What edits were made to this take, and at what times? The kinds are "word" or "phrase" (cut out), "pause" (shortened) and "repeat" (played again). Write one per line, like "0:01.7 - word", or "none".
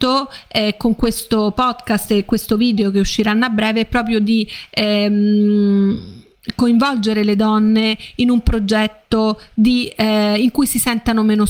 none